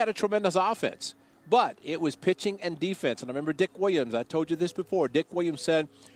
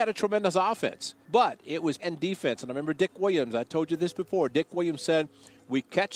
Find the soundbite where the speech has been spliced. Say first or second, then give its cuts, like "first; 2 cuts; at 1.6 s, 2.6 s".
second; 2 cuts; at 1.2 s, 2.0 s